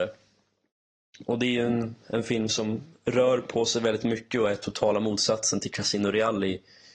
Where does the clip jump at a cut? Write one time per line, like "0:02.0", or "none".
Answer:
none